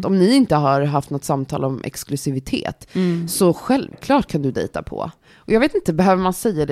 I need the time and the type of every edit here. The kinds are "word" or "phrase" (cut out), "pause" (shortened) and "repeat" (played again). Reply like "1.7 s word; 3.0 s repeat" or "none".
none